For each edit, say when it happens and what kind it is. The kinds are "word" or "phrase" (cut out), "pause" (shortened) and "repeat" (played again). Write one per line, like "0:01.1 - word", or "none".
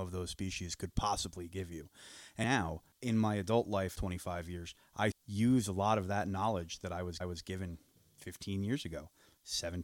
0:02.4 - word
0:02.9 - pause
0:04.0 - phrase
0:05.1 - word
0:07.2 - repeat